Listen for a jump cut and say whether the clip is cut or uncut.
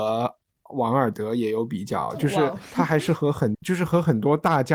cut